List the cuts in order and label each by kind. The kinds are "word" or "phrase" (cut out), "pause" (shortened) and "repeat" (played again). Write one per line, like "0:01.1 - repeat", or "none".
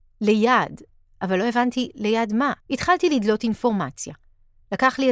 0:02.6 - pause